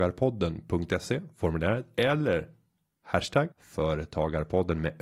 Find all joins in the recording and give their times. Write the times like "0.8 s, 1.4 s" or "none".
3.5 s